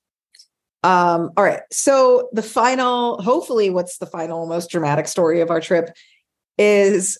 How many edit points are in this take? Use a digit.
1